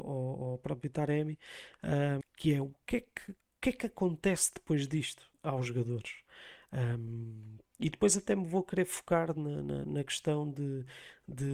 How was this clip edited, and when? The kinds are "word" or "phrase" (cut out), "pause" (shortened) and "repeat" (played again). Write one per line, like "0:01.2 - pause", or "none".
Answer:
0:02.2 - word
0:05.3 - pause